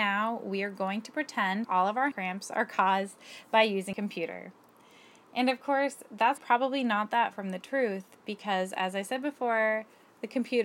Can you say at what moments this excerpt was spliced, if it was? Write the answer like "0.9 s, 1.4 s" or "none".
1.6 s, 2.1 s, 3.9 s, 6.4 s, 7.3 s